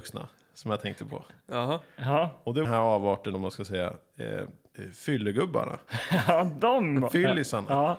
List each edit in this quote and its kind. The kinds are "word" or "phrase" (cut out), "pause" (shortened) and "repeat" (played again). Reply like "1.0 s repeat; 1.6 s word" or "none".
2.6 s phrase; 3.3 s word